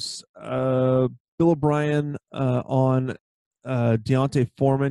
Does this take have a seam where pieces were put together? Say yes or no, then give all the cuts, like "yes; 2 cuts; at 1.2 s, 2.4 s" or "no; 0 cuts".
no; 0 cuts